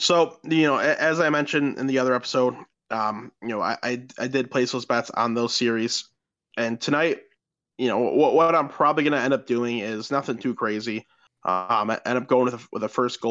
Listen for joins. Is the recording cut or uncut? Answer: uncut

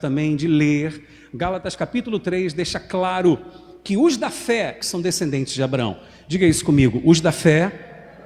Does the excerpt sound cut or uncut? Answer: cut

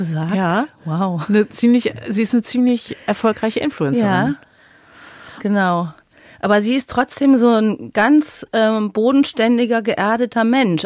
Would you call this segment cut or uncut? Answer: uncut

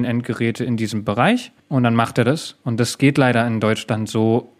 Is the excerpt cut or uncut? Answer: cut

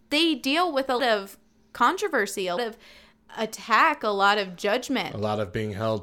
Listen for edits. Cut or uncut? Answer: cut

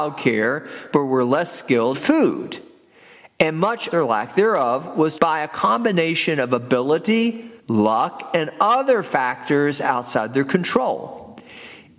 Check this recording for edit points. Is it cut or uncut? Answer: cut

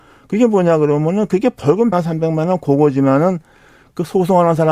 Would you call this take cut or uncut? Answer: cut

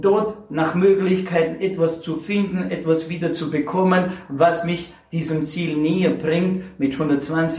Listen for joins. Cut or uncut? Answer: uncut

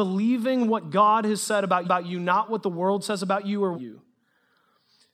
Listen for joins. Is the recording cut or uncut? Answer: cut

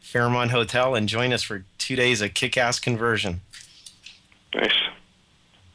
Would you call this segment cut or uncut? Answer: uncut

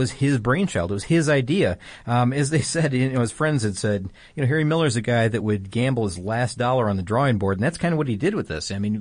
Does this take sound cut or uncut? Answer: uncut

